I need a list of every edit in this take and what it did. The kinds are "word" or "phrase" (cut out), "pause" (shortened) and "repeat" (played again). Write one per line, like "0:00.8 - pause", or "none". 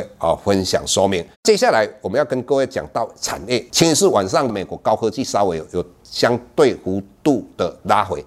0:01.3 - pause